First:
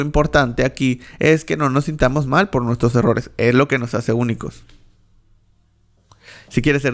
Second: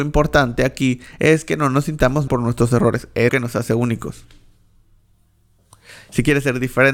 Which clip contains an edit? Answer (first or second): second